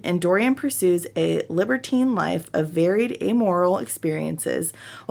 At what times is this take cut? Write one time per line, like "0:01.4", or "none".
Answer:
none